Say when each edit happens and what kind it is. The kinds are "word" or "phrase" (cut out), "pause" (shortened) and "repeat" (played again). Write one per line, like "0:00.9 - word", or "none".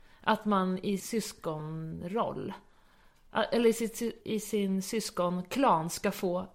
0:01.0 - word
0:04.2 - word